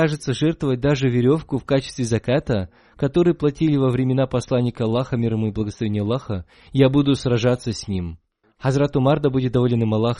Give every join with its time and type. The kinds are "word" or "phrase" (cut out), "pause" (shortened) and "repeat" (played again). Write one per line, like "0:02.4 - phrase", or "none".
0:08.4 - pause